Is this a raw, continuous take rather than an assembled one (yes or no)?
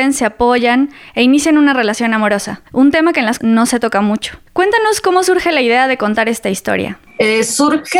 no